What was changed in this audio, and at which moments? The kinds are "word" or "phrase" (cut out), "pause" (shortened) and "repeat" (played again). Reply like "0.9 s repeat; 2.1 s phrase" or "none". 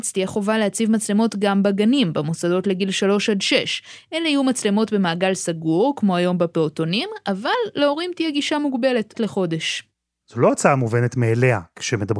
9.1 s word